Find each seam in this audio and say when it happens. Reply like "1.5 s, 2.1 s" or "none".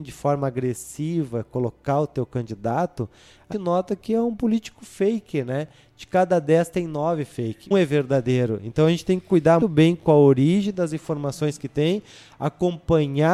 3.5 s, 7.7 s, 9.6 s

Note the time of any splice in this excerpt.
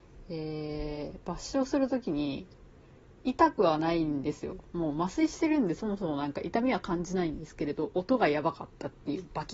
none

